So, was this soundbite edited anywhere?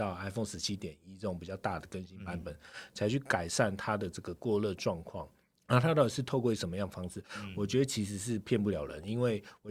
yes; 1 cut; at 5.5 s

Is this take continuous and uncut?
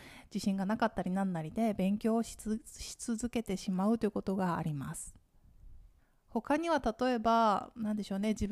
no; 1 cut; at 6.0 s

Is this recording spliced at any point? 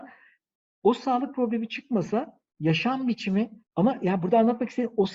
yes; 2 cuts; at 2.5 s, 3.7 s

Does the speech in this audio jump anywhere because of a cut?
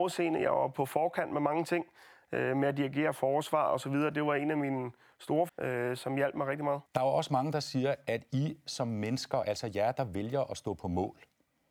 yes; 2 cuts; at 5.5 s, 6.9 s

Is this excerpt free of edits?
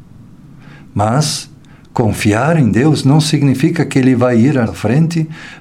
no; 1 cut; at 4.7 s

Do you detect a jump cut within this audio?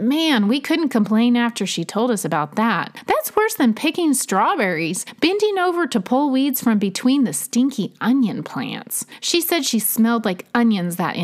no; 0 cuts

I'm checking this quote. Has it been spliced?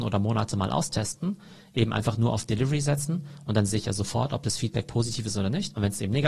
no; 0 cuts

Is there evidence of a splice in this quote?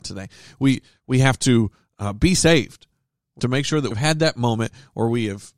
yes; 2 cuts; at 3.4 s, 3.9 s

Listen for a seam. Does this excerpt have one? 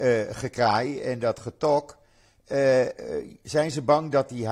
no; 0 cuts

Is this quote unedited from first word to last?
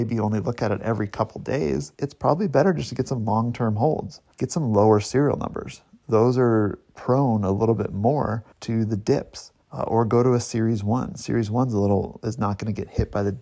no; 4 cuts; at 1.9 s, 4.3 s, 8.5 s, 9.6 s

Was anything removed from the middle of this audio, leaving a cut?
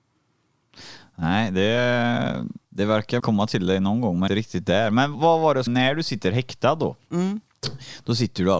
yes; 5 cuts; at 2.6 s, 3.2 s, 4.3 s, 5.1 s, 5.7 s

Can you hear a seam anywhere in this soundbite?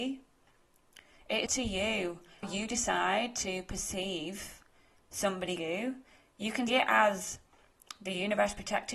yes; 4 cuts; at 1.5 s, 2.4 s, 5.6 s, 6.7 s

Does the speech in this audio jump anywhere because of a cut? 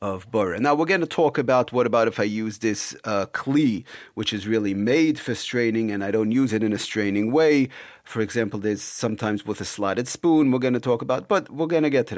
no; 0 cuts

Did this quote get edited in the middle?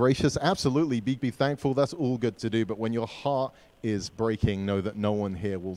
yes; 2 cuts; at 1.2 s, 2.4 s

